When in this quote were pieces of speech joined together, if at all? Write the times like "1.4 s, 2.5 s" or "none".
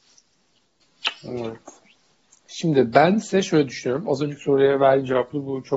none